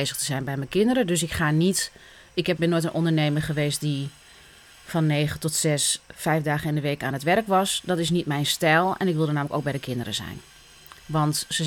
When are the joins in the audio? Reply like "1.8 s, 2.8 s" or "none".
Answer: 2.6 s